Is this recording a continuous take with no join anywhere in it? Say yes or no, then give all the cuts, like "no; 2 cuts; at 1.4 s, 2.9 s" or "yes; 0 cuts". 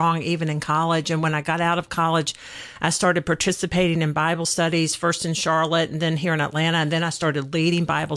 yes; 0 cuts